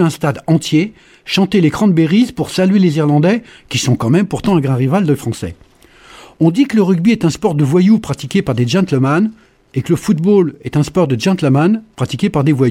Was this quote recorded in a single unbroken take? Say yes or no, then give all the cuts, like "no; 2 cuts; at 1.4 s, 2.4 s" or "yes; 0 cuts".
yes; 0 cuts